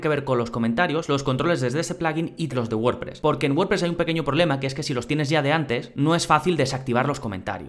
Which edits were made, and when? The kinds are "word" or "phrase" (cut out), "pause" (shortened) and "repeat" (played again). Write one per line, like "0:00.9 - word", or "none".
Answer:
0:02.5 - word